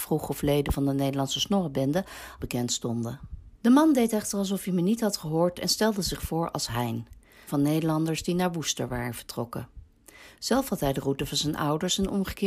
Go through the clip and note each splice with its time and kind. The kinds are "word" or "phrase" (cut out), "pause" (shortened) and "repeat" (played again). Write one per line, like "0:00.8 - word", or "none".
0:02.4 - phrase
0:03.5 - pause
0:07.5 - word